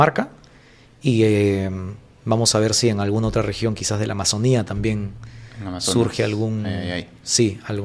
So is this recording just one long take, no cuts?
yes; 0 cuts

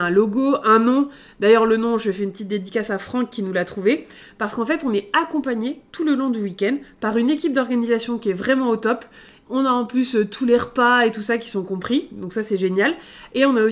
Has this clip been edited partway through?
no; 0 cuts

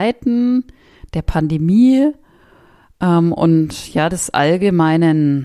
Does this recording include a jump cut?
no; 0 cuts

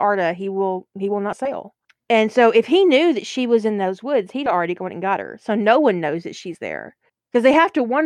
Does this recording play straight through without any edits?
yes; 0 cuts

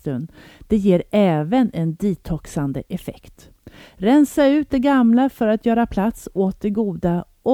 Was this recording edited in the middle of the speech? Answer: no; 0 cuts

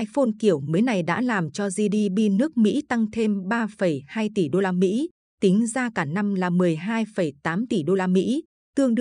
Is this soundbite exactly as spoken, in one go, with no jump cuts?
yes; 0 cuts

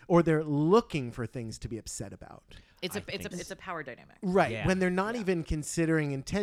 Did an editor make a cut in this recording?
yes; 1 cut; at 3.3 s

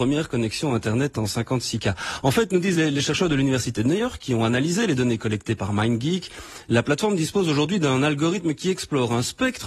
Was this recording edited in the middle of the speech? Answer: no; 0 cuts

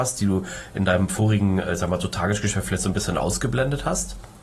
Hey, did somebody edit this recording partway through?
no; 0 cuts

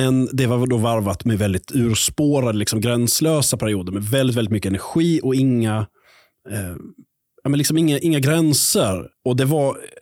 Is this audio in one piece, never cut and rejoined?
yes; 0 cuts

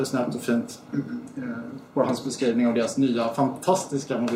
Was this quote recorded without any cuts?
yes; 0 cuts

